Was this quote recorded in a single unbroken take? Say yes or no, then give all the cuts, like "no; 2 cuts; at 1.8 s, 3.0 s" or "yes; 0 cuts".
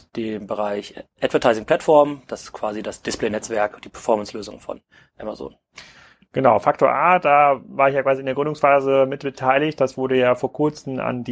yes; 0 cuts